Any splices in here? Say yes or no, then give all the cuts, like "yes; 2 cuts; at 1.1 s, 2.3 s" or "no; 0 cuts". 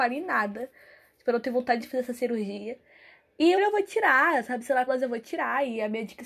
yes; 3 cuts; at 1.8 s, 3.6 s, 4.9 s